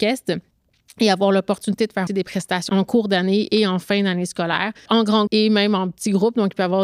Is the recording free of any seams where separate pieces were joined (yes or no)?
no